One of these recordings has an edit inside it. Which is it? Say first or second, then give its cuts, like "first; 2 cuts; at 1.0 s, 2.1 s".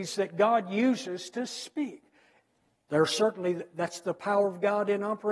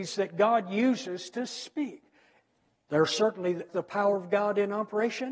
second; 1 cut; at 3.7 s